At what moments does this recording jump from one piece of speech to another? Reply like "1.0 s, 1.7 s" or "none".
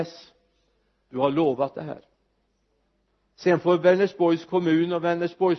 none